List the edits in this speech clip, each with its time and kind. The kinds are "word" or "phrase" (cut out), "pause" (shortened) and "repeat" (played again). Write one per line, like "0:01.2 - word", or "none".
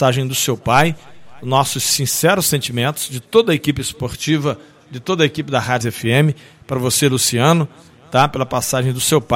0:05.8 - word